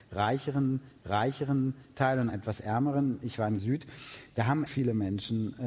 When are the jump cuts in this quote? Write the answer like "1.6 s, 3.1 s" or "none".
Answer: 1.0 s, 2.3 s, 3.6 s, 4.7 s